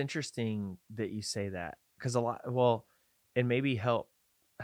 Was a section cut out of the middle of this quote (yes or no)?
no